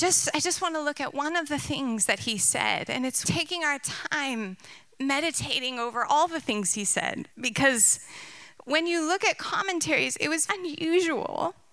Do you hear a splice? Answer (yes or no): yes